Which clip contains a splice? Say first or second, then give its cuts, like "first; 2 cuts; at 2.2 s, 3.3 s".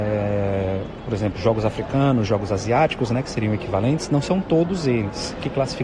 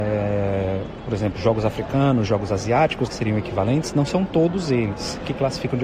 second; 1 cut; at 3.1 s